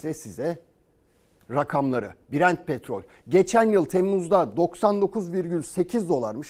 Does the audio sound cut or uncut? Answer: uncut